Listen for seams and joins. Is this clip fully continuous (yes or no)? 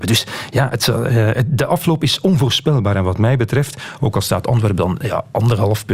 yes